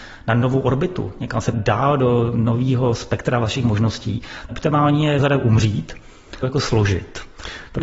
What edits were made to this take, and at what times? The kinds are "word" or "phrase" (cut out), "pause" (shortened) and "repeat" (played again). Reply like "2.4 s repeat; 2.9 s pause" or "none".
1.5 s phrase; 4.5 s word; 5.2 s word; 6.4 s phrase